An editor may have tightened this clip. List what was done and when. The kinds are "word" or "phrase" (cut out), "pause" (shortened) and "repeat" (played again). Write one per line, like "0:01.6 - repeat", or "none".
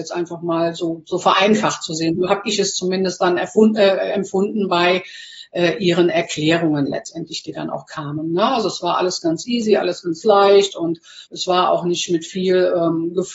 0:11.3 - pause